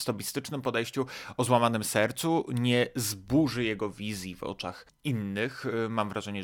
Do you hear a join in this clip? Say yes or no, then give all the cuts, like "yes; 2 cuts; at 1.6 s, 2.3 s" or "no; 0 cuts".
no; 0 cuts